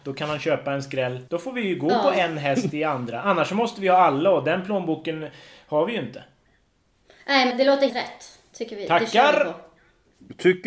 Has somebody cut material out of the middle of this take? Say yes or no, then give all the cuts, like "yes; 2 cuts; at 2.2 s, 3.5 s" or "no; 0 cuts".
yes; 3 cuts; at 1.3 s, 7.5 s, 7.9 s